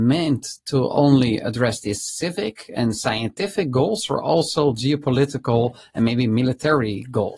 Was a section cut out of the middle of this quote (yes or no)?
no